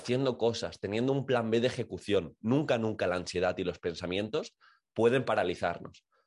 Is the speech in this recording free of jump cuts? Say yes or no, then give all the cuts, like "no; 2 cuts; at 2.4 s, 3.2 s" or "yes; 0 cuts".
yes; 0 cuts